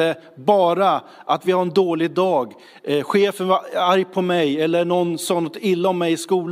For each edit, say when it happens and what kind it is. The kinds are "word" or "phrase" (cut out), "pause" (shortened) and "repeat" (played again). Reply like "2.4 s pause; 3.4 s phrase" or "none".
none